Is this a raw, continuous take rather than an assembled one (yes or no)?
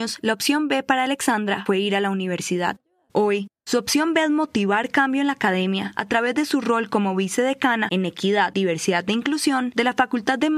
yes